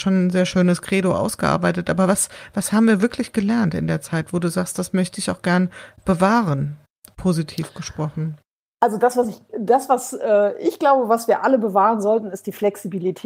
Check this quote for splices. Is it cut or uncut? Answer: uncut